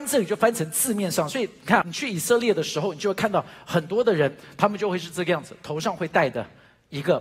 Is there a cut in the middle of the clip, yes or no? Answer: yes